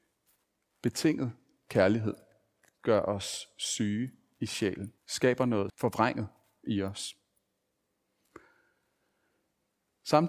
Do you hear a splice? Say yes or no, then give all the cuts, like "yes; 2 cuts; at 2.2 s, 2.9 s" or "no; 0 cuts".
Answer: yes; 2 cuts; at 5.0 s, 5.7 s